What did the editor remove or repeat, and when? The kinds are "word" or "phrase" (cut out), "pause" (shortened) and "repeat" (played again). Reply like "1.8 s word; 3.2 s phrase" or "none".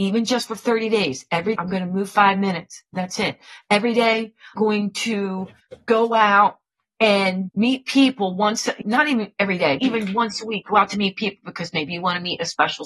1.5 s word; 2.1 s word; 4.6 s word; 7.5 s word; 8.8 s word; 9.8 s word